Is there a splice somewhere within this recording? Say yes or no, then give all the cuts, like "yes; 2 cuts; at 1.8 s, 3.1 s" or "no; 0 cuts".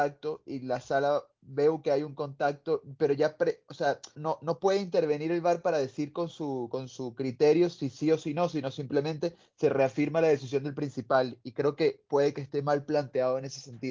yes; 1 cut; at 4.1 s